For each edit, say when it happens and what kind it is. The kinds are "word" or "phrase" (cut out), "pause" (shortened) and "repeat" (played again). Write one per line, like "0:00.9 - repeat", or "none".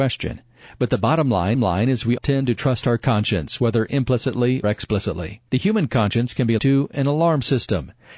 0:01.5 - repeat
0:02.2 - word
0:04.6 - word
0:05.5 - pause
0:06.6 - word

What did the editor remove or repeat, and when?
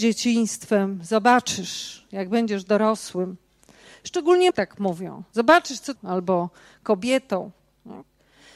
0:04.5 - word
0:05.9 - phrase

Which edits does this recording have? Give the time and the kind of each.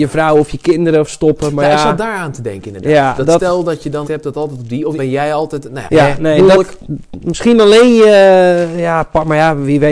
0:01.1 - phrase
0:04.0 - phrase
0:05.0 - phrase
0:05.9 - word

